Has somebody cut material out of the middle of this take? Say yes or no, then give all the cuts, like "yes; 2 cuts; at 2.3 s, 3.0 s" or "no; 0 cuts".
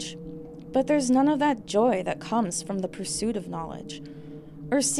no; 0 cuts